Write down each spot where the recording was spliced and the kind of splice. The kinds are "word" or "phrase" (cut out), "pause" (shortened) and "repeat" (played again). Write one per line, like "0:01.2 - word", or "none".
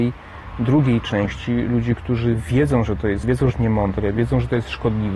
0:03.2 - word
0:03.5 - phrase